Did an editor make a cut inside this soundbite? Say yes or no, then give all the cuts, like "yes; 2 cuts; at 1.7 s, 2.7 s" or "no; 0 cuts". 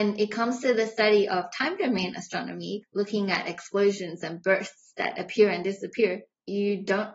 no; 0 cuts